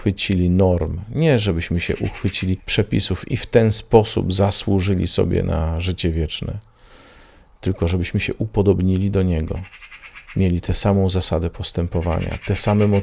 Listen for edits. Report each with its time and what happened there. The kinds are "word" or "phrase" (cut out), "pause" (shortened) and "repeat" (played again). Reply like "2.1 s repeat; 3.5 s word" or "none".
none